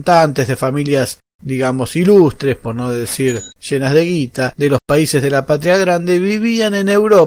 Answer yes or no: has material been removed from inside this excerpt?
yes